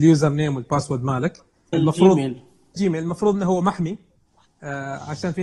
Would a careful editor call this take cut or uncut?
cut